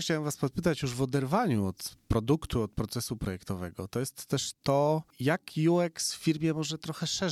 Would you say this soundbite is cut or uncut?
uncut